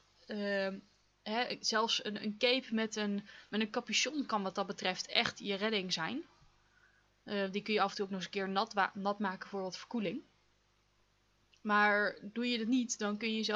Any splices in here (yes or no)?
no